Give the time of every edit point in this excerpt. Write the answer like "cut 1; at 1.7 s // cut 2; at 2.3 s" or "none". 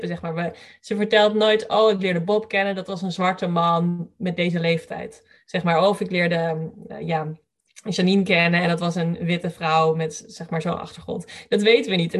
none